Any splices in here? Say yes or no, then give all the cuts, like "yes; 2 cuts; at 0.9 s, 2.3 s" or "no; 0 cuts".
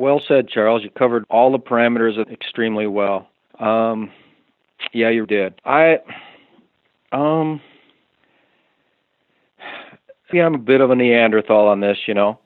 yes; 6 cuts; at 1.2 s, 2.2 s, 3.5 s, 5.2 s, 5.6 s, 10.3 s